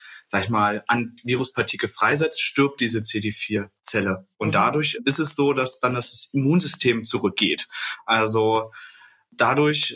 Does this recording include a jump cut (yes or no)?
no